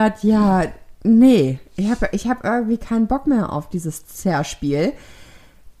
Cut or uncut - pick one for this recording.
uncut